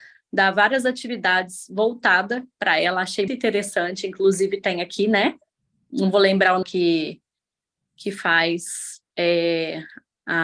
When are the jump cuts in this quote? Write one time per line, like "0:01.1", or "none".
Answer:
0:03.3
0:05.5
0:06.6